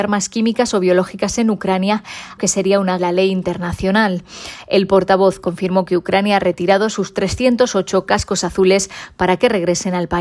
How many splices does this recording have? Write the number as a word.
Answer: two